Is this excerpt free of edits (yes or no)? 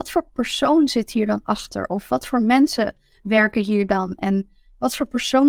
yes